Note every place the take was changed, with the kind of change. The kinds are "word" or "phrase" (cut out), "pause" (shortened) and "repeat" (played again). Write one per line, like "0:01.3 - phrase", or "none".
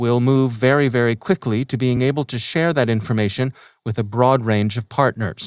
none